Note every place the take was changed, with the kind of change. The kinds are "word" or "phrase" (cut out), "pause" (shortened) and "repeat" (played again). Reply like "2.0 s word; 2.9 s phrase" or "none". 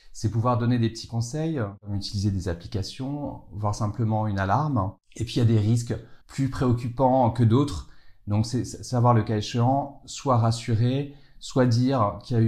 6.2 s pause